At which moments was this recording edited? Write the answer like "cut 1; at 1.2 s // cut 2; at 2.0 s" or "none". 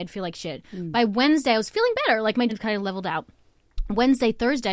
cut 1; at 2.5 s

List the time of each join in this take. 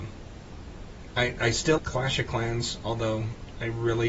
cut 1; at 1.8 s

